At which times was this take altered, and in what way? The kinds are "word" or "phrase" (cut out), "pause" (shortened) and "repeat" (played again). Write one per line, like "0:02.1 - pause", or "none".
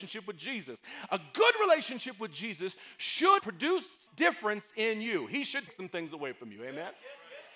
0:03.4 - word
0:04.1 - word
0:05.7 - word